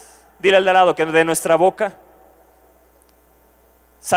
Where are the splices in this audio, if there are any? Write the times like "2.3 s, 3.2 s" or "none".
none